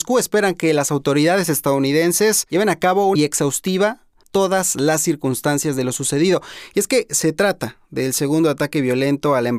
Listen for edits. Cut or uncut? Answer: cut